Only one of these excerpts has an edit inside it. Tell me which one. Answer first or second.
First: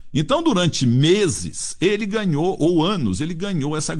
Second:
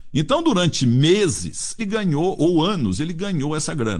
second